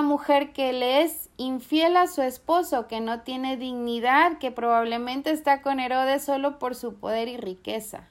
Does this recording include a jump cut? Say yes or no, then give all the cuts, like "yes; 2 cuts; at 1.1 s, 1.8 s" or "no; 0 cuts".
no; 0 cuts